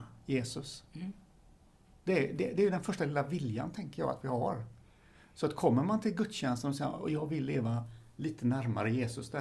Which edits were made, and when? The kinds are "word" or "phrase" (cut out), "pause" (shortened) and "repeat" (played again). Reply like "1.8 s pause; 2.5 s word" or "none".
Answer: none